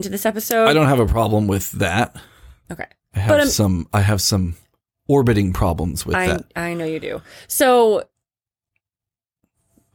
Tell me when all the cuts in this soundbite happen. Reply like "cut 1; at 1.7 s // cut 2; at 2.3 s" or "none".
none